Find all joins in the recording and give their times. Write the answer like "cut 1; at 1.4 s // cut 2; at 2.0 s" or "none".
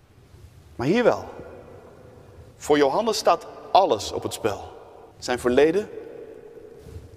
cut 1; at 2.5 s // cut 2; at 5.1 s